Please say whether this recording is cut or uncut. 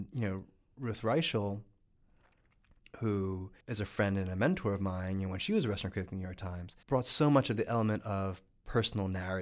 cut